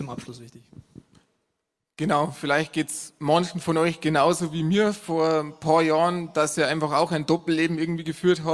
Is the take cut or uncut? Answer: uncut